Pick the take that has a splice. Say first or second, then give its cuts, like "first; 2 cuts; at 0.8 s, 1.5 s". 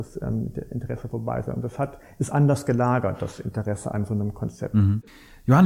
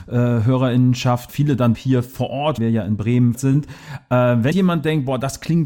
second; 5 cuts; at 1.3 s, 1.7 s, 2.6 s, 3.3 s, 4.5 s